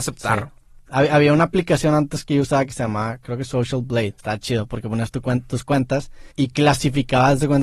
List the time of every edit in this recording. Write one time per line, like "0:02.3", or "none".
0:04.2
0:06.3